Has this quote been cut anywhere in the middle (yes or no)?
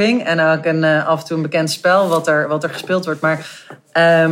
no